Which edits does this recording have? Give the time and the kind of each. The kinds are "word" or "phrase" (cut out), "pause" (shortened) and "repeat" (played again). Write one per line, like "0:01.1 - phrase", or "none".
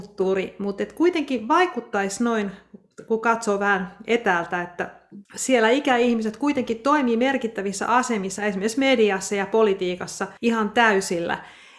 0:05.3 - pause
0:10.4 - pause